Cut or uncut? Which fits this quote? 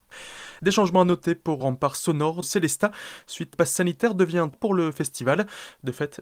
cut